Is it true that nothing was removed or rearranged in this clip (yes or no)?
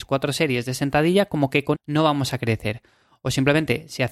no